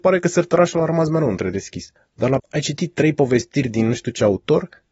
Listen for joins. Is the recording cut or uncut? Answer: cut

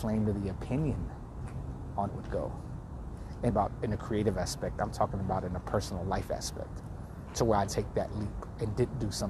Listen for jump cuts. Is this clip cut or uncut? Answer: cut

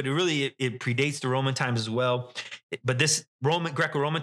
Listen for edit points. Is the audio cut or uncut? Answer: uncut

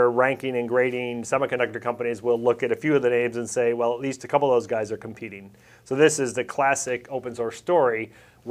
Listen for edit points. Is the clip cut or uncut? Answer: uncut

